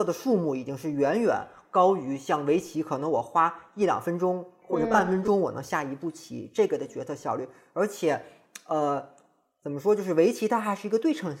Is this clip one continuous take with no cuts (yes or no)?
yes